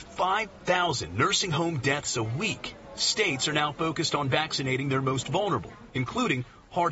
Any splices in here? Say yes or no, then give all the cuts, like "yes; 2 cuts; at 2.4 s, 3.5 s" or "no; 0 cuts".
no; 0 cuts